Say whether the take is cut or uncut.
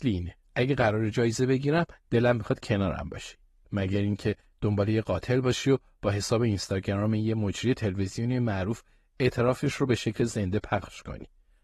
uncut